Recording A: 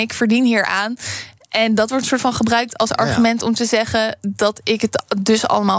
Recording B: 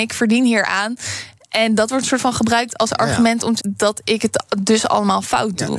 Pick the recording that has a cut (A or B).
B